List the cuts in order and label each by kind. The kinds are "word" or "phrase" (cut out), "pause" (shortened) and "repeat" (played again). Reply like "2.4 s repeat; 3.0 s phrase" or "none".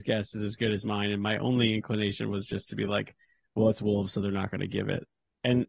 none